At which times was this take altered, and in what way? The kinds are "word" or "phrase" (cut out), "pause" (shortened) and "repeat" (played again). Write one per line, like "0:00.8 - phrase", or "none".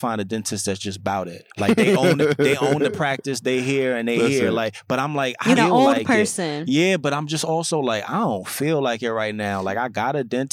0:01.5 - pause
0:05.6 - phrase